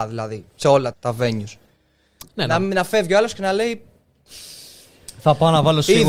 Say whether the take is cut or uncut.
cut